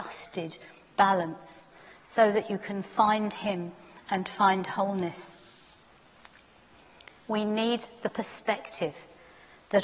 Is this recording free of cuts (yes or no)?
yes